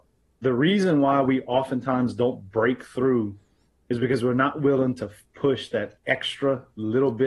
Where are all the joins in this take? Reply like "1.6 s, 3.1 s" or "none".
6.0 s